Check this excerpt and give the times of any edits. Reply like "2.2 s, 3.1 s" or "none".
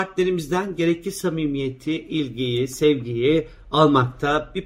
none